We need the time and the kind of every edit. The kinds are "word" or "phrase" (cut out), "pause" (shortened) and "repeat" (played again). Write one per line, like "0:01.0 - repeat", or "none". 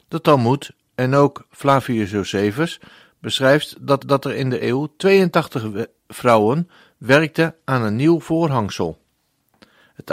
0:04.0 - repeat
0:04.6 - word